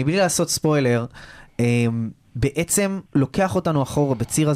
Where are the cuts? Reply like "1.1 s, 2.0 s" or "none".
3.1 s